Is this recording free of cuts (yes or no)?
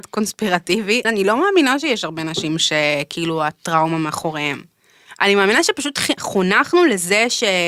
no